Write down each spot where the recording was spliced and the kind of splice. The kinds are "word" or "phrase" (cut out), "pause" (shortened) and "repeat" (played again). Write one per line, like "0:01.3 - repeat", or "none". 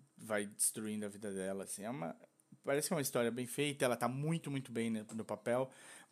none